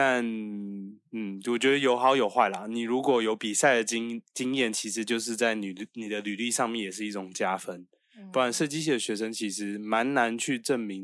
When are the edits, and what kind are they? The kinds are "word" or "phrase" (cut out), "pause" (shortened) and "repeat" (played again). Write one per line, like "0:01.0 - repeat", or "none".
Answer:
none